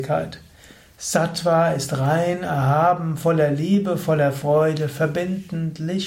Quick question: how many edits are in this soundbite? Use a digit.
0